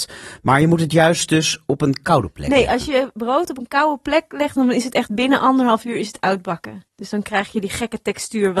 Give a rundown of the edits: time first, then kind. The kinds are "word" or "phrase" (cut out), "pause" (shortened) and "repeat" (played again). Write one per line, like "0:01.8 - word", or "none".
0:06.9 - pause